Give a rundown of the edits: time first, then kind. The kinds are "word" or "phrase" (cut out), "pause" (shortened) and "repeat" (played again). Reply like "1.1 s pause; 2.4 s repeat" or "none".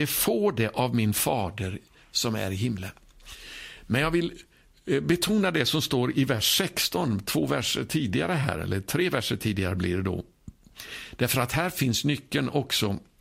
none

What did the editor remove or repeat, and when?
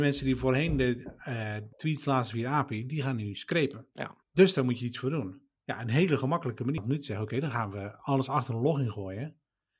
1.7 s pause; 4.2 s pause; 6.8 s phrase

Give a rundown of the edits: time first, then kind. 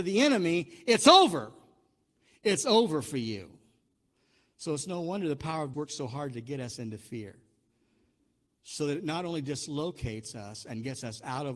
5.7 s word

